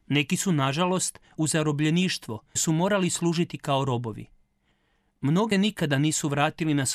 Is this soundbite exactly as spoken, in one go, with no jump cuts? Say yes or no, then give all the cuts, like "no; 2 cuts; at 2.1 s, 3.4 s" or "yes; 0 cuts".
no; 3 cuts; at 1.4 s, 2.6 s, 5.5 s